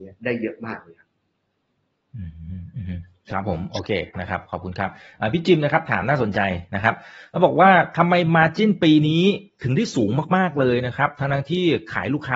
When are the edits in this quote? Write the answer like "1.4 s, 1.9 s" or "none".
none